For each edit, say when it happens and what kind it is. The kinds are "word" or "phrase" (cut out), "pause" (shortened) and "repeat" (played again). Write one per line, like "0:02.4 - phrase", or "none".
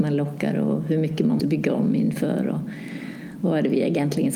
0:01.4 - word